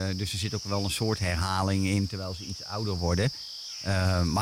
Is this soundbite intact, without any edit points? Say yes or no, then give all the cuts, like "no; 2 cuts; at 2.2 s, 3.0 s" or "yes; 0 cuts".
yes; 0 cuts